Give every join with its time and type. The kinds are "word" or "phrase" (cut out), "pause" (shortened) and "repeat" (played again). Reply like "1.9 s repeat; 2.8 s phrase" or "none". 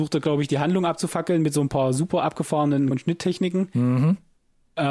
2.9 s word